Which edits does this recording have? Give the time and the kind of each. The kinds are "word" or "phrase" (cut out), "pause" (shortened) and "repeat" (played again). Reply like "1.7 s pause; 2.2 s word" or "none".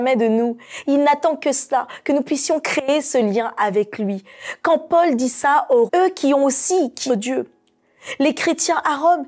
5.9 s word; 7.1 s phrase